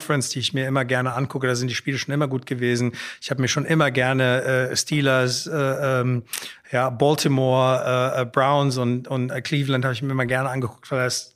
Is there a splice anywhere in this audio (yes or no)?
no